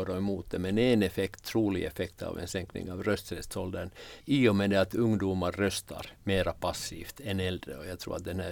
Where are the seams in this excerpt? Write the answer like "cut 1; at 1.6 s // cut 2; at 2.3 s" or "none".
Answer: cut 1; at 4.2 s // cut 2; at 6.2 s

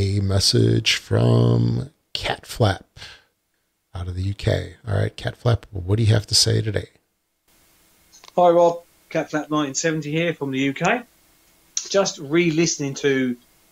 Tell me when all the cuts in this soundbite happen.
none

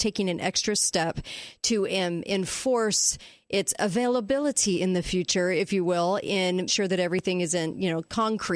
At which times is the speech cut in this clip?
cut 1; at 6.7 s

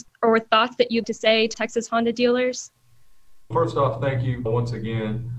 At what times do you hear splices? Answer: cut 1; at 1.0 s // cut 2; at 1.5 s // cut 3; at 3.5 s // cut 4; at 4.5 s

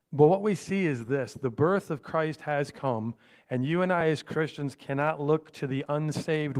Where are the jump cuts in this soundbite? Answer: none

